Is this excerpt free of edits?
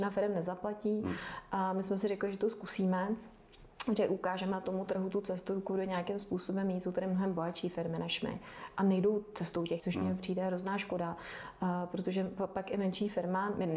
no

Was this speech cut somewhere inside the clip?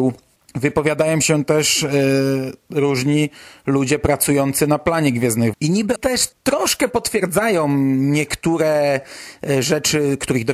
yes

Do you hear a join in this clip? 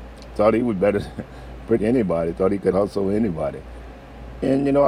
yes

